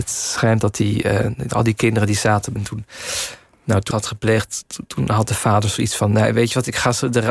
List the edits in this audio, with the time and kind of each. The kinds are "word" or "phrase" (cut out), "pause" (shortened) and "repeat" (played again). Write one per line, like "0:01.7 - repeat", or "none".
0:02.6 - phrase
0:03.9 - phrase